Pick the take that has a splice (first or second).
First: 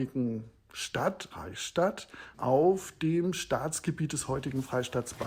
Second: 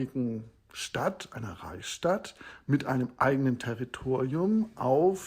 first